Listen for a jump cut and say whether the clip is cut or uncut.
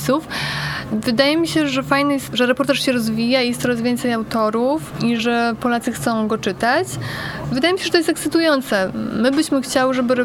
cut